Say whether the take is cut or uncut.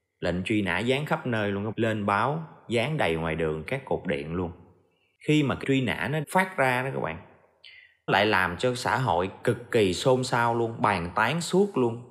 cut